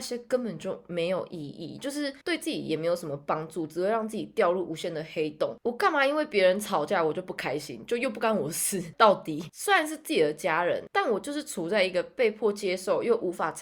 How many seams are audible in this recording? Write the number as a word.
one